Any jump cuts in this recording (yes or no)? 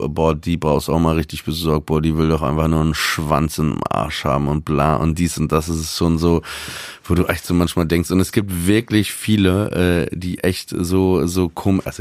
no